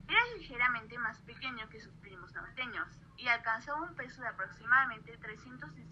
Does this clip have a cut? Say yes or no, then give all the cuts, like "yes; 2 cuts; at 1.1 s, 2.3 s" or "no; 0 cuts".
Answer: no; 0 cuts